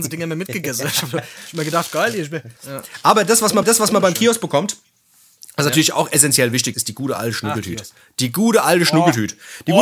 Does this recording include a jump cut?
yes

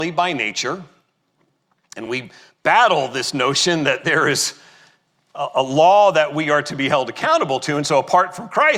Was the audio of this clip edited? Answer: no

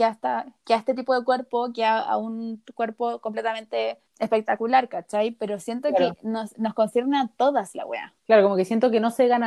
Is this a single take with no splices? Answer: no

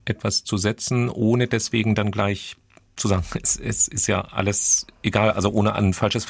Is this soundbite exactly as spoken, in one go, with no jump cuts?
yes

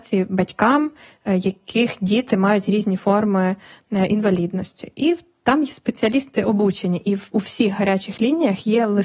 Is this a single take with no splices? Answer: yes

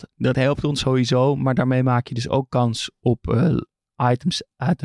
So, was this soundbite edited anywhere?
no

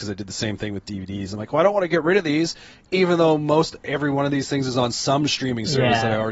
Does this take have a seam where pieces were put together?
no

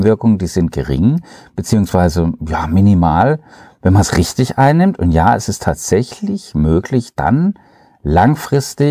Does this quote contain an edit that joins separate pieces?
no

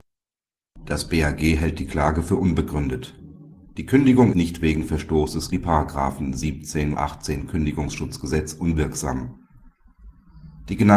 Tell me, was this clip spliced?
yes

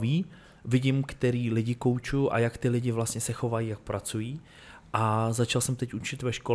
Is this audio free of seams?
yes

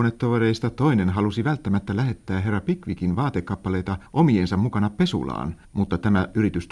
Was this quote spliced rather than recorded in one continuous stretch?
yes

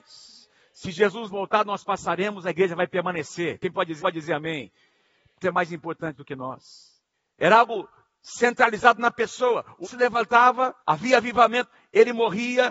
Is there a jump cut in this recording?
yes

